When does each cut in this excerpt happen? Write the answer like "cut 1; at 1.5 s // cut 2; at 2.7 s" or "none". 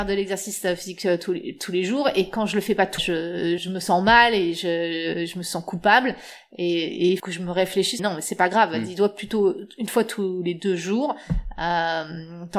cut 1; at 3.0 s // cut 2; at 3.6 s // cut 3; at 7.2 s // cut 4; at 8.0 s